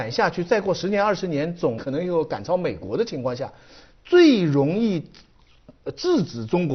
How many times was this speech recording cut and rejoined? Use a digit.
1